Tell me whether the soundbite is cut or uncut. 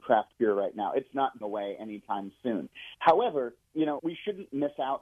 cut